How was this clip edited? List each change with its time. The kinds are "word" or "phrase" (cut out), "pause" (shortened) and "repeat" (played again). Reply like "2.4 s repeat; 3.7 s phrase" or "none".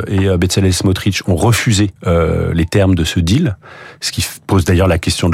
2.0 s pause